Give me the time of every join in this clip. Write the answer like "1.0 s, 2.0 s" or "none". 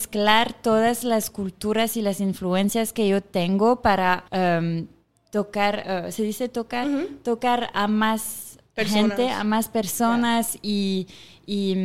4.3 s